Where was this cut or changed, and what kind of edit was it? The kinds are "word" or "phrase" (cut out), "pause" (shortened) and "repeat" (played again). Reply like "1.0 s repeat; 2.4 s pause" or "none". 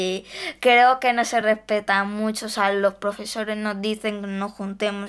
none